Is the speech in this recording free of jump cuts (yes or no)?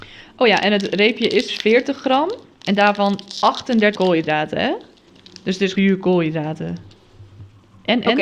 no